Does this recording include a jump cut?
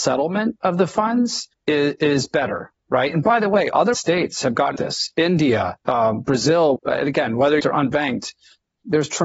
yes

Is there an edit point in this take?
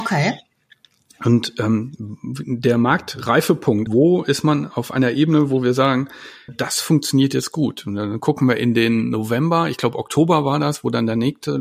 yes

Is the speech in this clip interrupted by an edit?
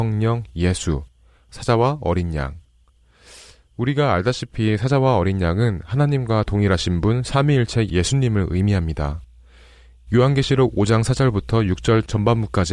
no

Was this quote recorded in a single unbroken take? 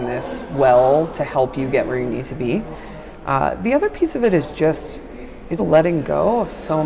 no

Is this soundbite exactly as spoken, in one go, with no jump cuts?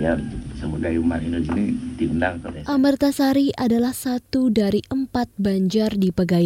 yes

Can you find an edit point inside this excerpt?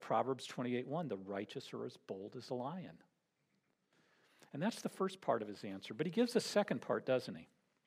no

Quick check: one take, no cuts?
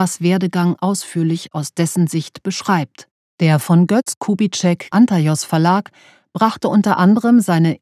no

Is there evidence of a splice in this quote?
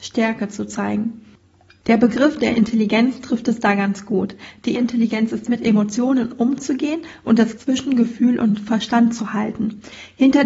yes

